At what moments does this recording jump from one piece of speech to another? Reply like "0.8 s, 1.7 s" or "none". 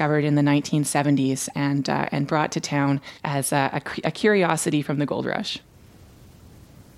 3.2 s